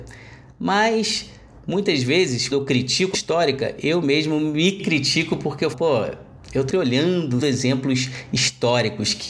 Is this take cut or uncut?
cut